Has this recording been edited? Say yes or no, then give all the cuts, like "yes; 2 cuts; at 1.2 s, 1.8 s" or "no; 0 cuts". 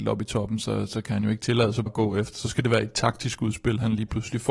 yes; 1 cut; at 1.9 s